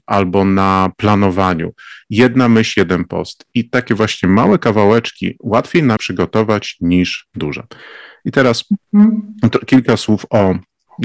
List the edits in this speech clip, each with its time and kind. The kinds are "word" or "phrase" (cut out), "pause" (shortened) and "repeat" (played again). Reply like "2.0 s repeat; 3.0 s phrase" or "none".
6.0 s word

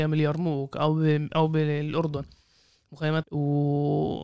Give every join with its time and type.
3.2 s word

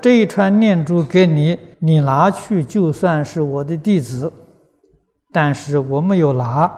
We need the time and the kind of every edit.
1.7 s pause

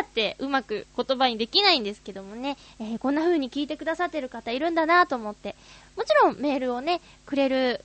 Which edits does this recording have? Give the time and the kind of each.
none

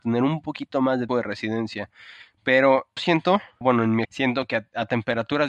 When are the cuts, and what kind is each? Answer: 1.1 s word; 3.0 s word; 3.6 s word; 4.0 s word

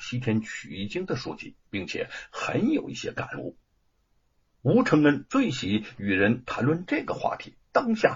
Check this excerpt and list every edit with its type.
1.6 s pause

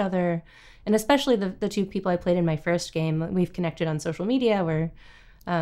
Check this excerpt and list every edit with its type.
none

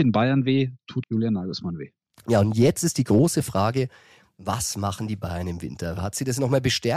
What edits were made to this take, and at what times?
1.0 s word

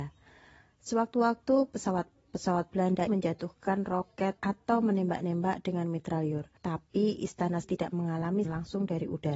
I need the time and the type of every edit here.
3.1 s word; 4.4 s pause; 6.6 s pause; 7.6 s word; 8.4 s word

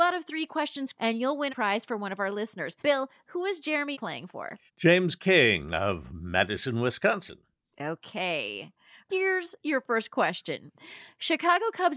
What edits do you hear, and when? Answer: 0.9 s word; 1.5 s word; 2.8 s pause; 3.9 s word; 4.7 s pause

